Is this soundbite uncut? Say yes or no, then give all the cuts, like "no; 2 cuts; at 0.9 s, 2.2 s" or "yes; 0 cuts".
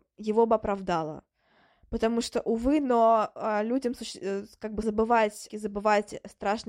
no; 2 cuts; at 4.8 s, 5.5 s